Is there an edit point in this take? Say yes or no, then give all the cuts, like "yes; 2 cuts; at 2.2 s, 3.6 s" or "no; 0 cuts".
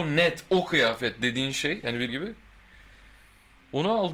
yes; 1 cut; at 2.1 s